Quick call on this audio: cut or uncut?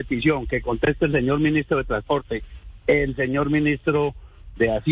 uncut